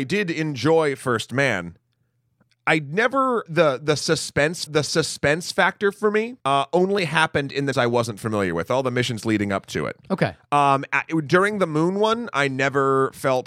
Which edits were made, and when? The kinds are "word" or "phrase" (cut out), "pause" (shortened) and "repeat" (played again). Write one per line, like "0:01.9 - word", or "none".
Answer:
0:02.5 - word
0:03.5 - word
0:04.7 - repeat
0:06.4 - pause
0:07.7 - word